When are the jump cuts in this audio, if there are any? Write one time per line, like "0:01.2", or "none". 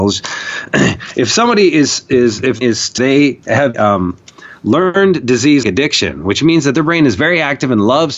0:02.6
0:03.0
0:03.7
0:05.6

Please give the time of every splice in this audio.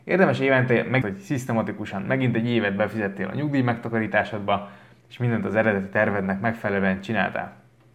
0:01.0

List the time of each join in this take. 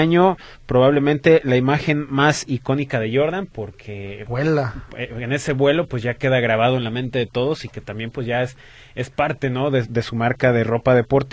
none

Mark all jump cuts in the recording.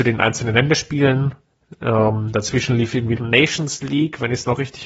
0:03.2

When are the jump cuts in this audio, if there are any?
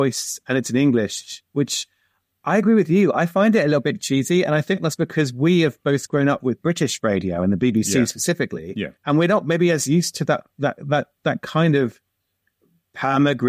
0:01.5
0:08.9
0:10.5

